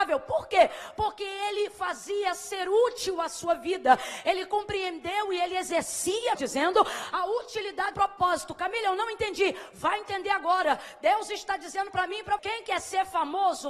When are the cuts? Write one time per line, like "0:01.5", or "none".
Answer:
0:06.3
0:07.9
0:12.4